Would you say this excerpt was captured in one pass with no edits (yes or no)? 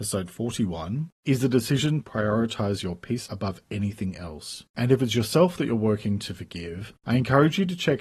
no